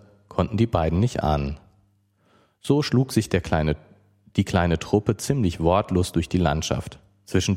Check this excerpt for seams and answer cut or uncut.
uncut